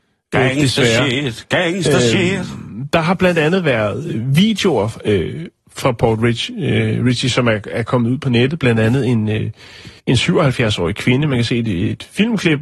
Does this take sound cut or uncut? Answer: cut